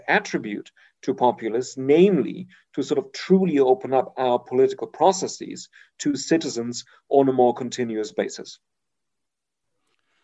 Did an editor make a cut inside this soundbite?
no; 0 cuts

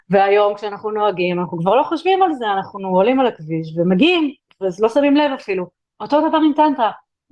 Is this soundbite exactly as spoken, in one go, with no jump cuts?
yes; 0 cuts

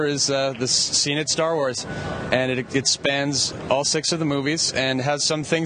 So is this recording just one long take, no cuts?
yes; 0 cuts

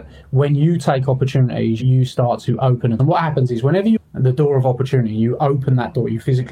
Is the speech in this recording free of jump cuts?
no; 2 cuts; at 3.0 s, 4.0 s

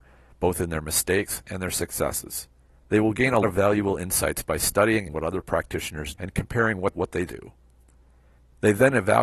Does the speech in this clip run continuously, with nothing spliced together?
no; 6 cuts; at 2.6 s, 3.4 s, 5.1 s, 6.1 s, 6.9 s, 7.3 s

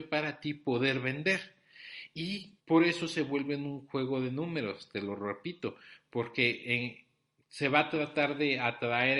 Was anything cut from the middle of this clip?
yes; 1 cut; at 2.6 s

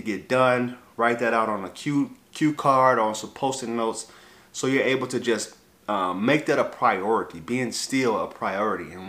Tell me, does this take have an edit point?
no; 0 cuts

